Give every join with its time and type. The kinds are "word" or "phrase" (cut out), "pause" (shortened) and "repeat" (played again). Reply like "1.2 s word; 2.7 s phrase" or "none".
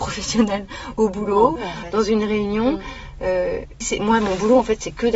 1.6 s word; 3.8 s word